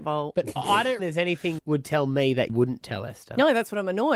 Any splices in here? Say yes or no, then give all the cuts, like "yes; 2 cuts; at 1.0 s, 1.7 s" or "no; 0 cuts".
yes; 3 cuts; at 1.0 s, 1.6 s, 2.5 s